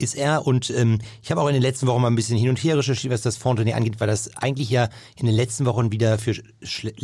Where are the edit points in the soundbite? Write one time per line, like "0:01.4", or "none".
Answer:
none